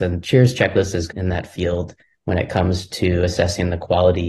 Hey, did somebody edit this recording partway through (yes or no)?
yes